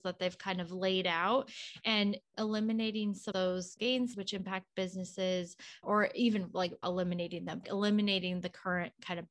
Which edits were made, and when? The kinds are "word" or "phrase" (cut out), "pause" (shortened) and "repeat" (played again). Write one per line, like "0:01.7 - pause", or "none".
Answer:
0:02.3 - word
0:03.3 - word
0:03.8 - word
0:04.1 - word
0:05.8 - word
0:06.8 - word
0:07.6 - word